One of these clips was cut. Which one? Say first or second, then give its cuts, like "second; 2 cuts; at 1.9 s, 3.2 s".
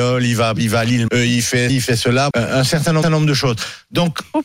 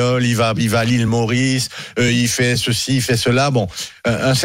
first; 4 cuts; at 1.1 s, 1.7 s, 2.3 s, 3.0 s